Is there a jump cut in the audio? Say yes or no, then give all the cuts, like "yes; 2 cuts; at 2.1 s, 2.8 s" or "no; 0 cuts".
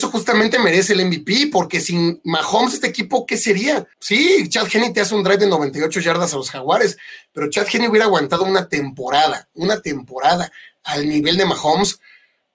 yes; 1 cut; at 3.9 s